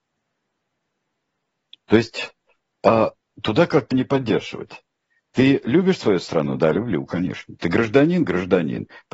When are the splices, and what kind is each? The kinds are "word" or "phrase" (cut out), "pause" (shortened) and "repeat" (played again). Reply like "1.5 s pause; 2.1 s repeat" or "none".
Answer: 3.9 s phrase